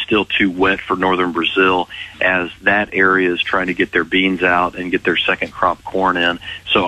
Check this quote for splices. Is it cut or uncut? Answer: uncut